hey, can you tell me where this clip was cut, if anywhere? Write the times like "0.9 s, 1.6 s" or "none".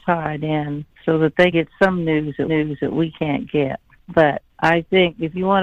0.9 s, 1.5 s, 2.5 s, 4.5 s